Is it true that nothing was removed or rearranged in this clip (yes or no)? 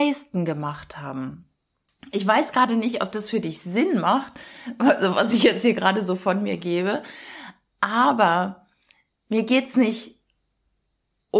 yes